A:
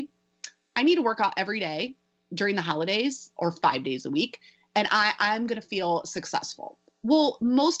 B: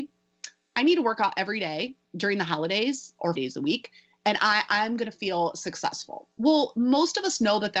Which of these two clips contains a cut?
B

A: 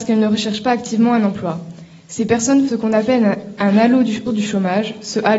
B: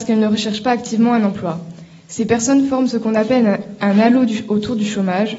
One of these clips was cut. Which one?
A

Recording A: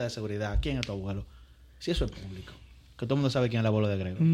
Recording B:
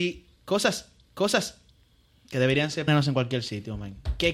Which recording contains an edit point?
B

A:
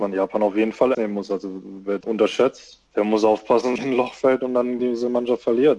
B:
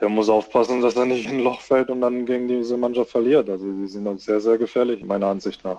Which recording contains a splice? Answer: A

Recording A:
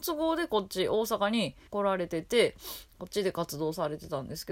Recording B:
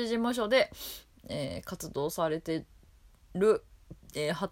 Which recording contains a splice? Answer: A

